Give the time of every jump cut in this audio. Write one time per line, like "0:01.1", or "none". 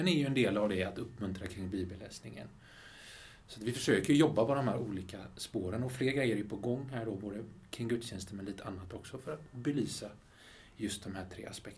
none